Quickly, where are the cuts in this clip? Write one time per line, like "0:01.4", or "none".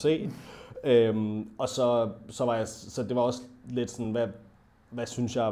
none